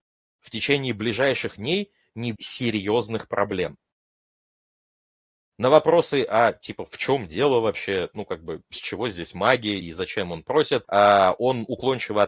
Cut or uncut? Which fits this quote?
cut